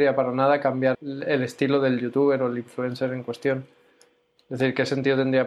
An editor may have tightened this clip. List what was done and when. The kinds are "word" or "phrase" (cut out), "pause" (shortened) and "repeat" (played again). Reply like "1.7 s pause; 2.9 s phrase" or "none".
0.9 s word